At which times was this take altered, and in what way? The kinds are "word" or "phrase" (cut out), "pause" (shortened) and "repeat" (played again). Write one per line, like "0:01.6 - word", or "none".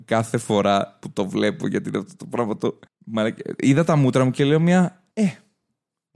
0:02.9 - pause
0:05.1 - pause